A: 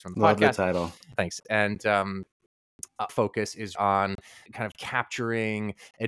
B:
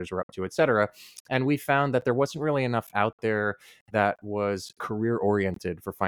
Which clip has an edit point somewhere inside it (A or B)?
A